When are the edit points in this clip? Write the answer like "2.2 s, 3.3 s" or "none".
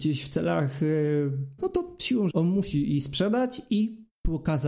1.6 s, 2.3 s